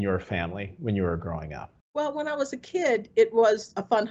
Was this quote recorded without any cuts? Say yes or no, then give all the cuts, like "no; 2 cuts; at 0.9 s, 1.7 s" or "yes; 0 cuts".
no; 1 cut; at 1.8 s